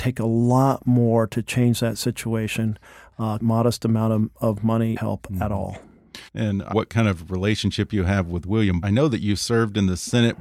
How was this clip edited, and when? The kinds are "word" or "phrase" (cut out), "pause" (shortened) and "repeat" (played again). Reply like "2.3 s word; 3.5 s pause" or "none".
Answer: 3.4 s phrase; 5.0 s phrase; 6.3 s pause; 6.7 s phrase; 8.8 s phrase